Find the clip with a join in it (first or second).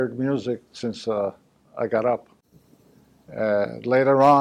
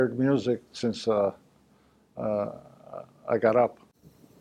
first